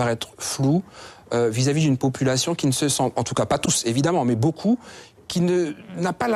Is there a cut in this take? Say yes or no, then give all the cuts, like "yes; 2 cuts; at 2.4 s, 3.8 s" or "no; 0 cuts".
no; 0 cuts